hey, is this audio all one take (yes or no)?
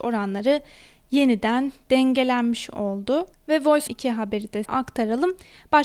no